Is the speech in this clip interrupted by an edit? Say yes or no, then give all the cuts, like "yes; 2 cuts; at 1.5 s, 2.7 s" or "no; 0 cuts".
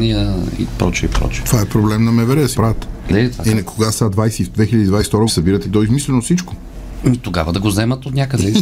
yes; 4 cuts; at 2.5 s, 3.1 s, 5.3 s, 5.6 s